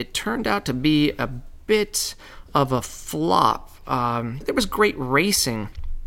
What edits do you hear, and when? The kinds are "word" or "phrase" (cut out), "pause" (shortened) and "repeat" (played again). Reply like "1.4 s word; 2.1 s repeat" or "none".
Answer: 4.4 s word